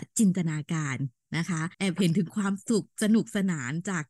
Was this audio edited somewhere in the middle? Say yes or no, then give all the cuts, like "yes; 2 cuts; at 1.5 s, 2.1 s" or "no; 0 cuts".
yes; 1 cut; at 1.7 s